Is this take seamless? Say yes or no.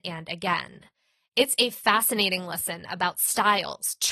yes